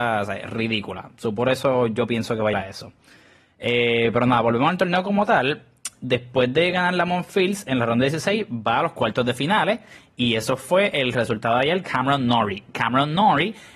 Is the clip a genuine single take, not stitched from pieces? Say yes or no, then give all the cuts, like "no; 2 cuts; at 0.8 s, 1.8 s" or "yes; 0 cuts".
no; 2 cuts; at 2.5 s, 11.8 s